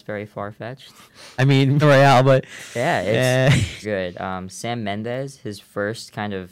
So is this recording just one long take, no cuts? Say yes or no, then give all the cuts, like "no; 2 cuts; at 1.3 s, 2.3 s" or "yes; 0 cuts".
no; 3 cuts; at 1.4 s, 1.8 s, 3.8 s